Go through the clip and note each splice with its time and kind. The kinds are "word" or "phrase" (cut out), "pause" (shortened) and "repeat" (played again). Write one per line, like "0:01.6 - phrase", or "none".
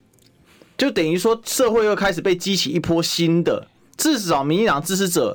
none